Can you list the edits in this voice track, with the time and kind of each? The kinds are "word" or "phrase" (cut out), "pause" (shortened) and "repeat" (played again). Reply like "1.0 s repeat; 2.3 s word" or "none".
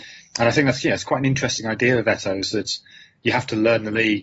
none